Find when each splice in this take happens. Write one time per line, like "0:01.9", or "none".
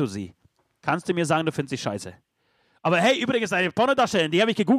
none

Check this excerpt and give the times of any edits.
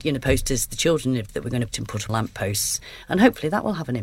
0:01.3
0:01.7
0:02.1

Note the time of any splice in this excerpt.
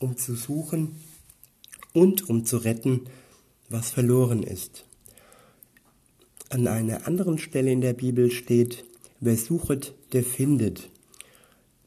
none

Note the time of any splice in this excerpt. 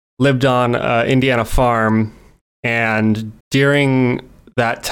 0:03.4

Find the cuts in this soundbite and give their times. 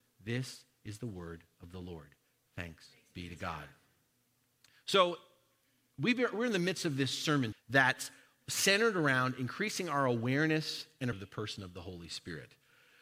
0:07.5
0:11.1

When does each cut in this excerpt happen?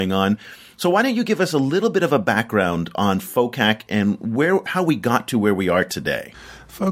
none

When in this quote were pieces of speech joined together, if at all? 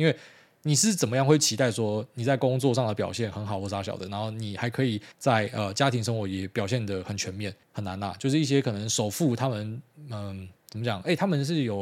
0:05.1
0:07.6

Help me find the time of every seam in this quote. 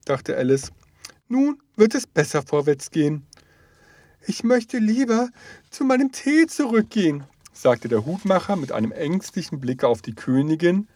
none

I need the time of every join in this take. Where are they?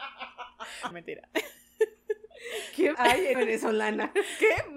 0:00.9
0:02.9
0:03.3

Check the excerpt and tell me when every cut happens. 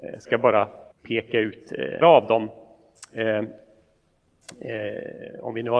0:00.9
0:02.0

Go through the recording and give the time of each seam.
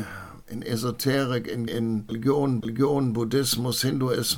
0:01.7
0:02.6

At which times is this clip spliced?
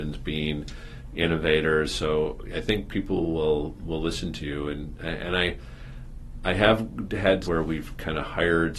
0:07.4

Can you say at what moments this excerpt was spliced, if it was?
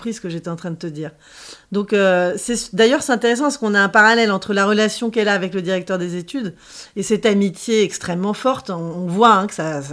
none

